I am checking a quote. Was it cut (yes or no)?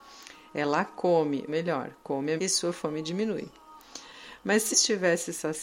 yes